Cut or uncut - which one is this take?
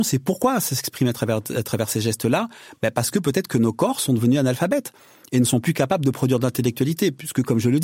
uncut